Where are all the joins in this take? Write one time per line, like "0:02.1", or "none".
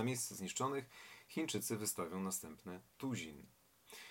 0:02.9